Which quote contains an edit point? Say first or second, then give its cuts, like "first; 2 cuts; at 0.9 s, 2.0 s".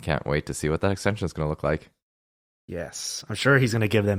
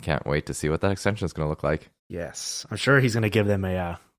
second; 1 cut; at 2.0 s